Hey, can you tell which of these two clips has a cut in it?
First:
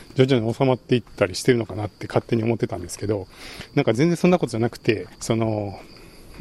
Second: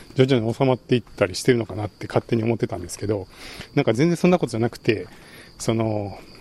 first; 1 cut; at 5.1 s

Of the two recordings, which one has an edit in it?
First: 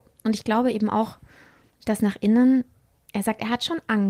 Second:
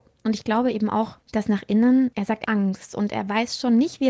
second; 3 cuts; at 1.2 s, 2.1 s, 2.4 s

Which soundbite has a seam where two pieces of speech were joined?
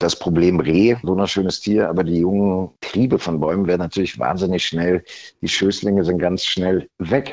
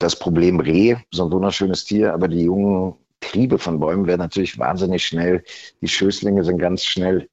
first; 2 cuts; at 1.0 s, 2.8 s

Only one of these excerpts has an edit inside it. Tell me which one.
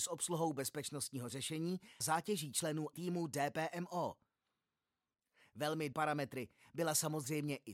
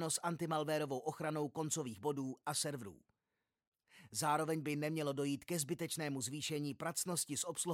first; 3 cuts; at 2.0 s, 2.9 s, 5.9 s

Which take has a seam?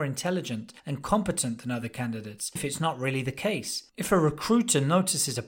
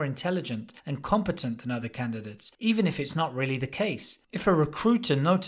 first; 1 cut; at 2.6 s

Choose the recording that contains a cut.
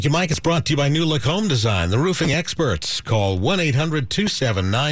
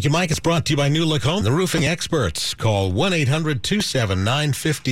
second; 1 cut; at 1.4 s

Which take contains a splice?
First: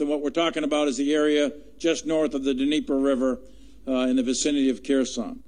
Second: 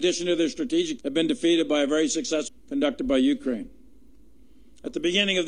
second; 2 cuts; at 1.0 s, 2.5 s

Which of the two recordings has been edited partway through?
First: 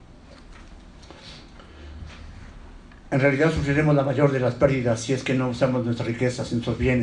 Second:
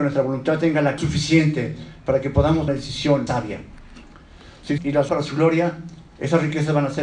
second; 6 cuts; at 1.0 s, 2.7 s, 3.3 s, 4.8 s, 5.1 s, 6.1 s

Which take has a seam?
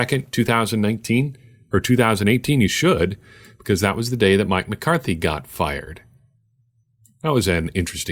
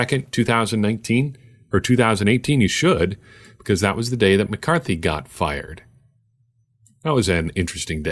second; 1 cut; at 4.5 s

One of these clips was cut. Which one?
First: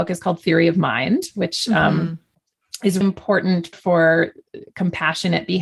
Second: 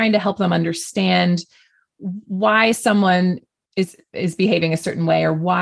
first; 2 cuts; at 3.0 s, 3.7 s

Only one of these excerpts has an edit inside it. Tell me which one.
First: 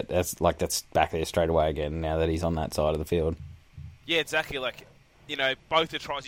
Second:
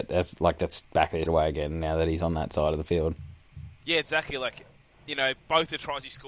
second; 1 cut; at 1.3 s

